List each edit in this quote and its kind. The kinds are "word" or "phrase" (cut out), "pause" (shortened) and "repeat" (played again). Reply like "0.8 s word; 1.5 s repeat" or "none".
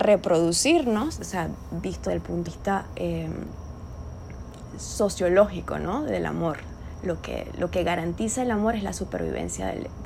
1.2 s word; 2.1 s word; 2.5 s word